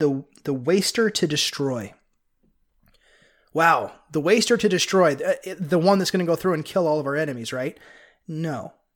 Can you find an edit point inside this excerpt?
no; 0 cuts

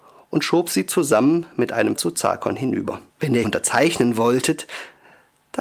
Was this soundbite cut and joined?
yes; 3 cuts; at 2.0 s, 3.1 s, 3.4 s

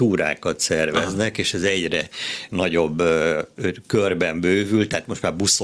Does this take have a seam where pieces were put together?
no; 0 cuts

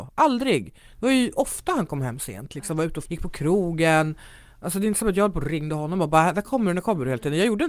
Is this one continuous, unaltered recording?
no; 1 cut; at 3.1 s

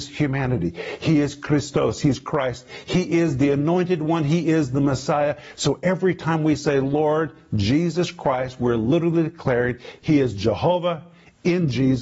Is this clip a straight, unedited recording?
yes; 0 cuts

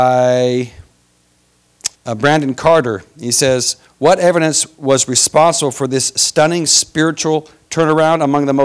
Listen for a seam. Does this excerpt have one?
yes; 1 cut; at 1.9 s

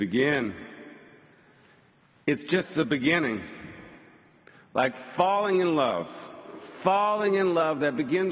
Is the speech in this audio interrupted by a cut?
no; 0 cuts

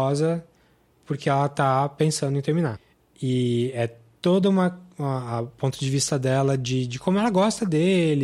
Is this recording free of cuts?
yes; 0 cuts

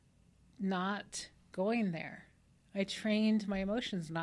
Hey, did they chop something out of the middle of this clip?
no; 0 cuts

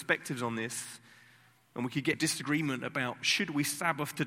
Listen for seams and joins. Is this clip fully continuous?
no; 1 cut; at 2.1 s

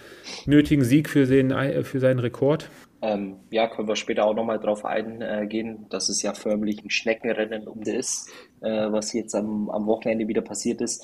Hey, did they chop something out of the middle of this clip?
yes; 3 cuts; at 6.8 s, 7.8 s, 8.5 s

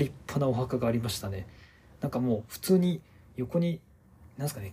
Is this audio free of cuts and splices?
yes; 0 cuts

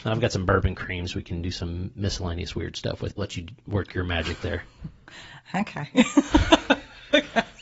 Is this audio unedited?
no; 1 cut; at 3.2 s

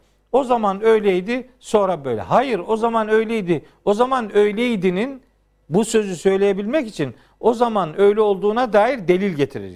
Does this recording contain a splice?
no; 0 cuts

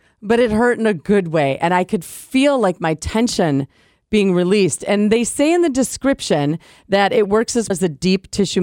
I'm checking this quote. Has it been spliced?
yes; 1 cut; at 7.7 s

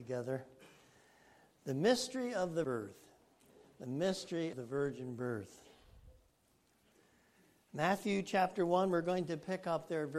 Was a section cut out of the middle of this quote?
yes; 2 cuts; at 2.6 s, 4.5 s

